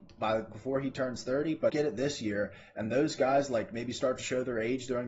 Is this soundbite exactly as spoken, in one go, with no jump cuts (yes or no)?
no